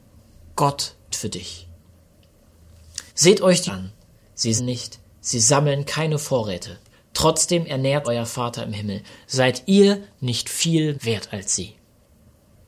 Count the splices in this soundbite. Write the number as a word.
seven